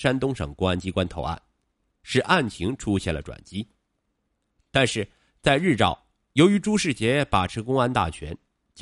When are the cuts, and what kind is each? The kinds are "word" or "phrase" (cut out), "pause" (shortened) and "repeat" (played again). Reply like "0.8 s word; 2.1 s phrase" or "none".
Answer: none